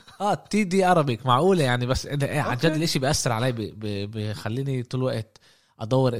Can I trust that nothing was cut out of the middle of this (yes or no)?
yes